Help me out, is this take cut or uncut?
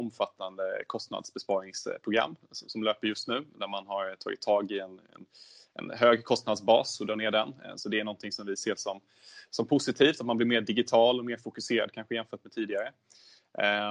uncut